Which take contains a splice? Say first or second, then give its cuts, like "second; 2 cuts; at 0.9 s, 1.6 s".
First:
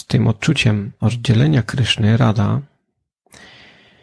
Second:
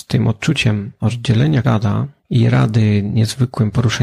second; 2 cuts; at 1.6 s, 2.2 s